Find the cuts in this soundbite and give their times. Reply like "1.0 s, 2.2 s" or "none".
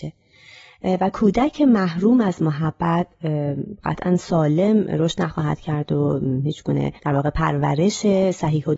7.0 s